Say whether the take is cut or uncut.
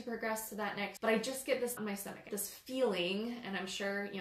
cut